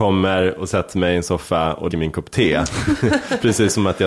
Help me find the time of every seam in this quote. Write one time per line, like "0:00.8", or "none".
0:01.9